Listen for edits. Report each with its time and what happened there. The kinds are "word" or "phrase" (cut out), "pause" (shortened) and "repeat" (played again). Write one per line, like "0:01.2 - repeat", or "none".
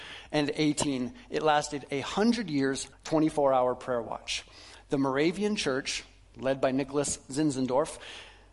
0:02.9 - word